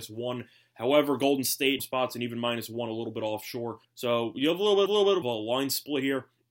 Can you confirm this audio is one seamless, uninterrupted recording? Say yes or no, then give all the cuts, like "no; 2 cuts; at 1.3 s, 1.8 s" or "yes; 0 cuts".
no; 4 cuts; at 1.8 s, 3.8 s, 4.9 s, 5.2 s